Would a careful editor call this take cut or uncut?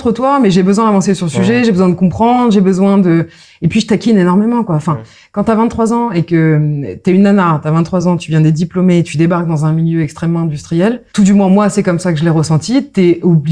uncut